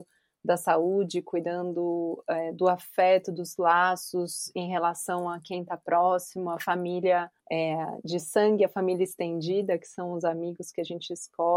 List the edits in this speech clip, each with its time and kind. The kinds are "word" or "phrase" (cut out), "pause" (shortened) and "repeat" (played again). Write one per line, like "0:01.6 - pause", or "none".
0:07.4 - pause